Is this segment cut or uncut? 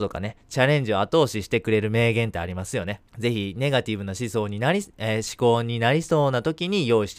cut